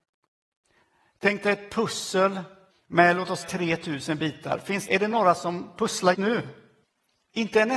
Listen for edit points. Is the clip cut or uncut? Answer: cut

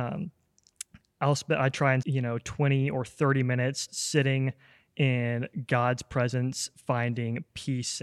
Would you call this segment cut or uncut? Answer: cut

